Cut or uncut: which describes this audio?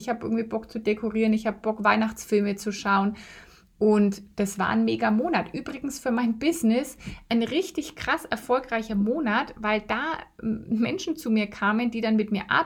uncut